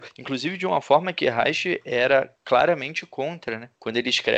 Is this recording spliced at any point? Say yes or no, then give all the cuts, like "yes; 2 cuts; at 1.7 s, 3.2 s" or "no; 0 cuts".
no; 0 cuts